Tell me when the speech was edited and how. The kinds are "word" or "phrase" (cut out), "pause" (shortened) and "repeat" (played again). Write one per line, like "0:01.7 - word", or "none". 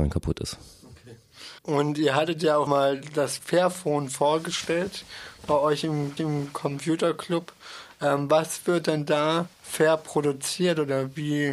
0:01.6 - pause
0:02.7 - word
0:03.4 - word
0:06.2 - repeat
0:09.5 - pause